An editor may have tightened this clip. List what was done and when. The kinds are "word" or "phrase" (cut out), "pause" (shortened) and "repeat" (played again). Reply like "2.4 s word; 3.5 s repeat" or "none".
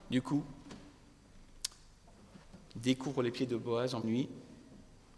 4.0 s word